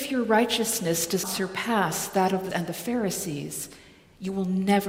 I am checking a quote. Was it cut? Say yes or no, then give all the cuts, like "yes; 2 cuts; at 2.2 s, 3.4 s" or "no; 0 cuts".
yes; 2 cuts; at 1.2 s, 2.5 s